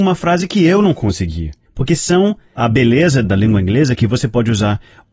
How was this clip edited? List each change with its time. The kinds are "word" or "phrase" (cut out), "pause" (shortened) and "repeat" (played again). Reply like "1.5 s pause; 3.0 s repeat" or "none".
1.7 s pause; 2.6 s word; 3.2 s word

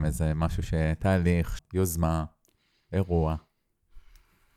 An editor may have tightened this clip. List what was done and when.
1.6 s phrase

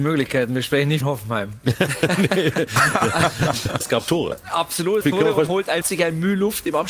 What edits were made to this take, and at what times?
1.0 s phrase; 3.8 s word; 5.0 s phrase; 5.5 s word; 5.8 s phrase

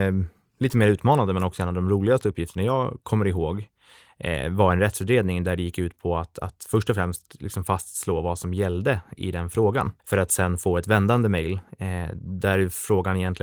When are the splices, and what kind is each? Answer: 10.0 s pause

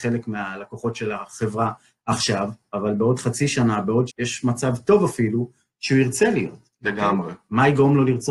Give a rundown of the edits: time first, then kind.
4.1 s word

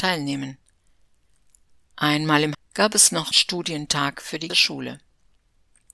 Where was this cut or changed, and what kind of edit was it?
2.5 s word; 3.3 s word; 4.5 s word

